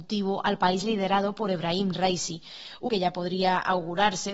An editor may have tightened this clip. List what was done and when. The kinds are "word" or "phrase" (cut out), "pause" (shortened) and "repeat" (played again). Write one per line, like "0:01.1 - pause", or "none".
0:02.9 - word